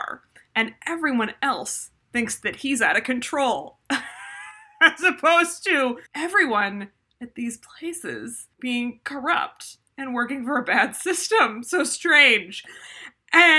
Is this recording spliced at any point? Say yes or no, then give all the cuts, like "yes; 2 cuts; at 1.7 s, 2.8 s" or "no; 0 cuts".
yes; 2 cuts; at 6.1 s, 8.5 s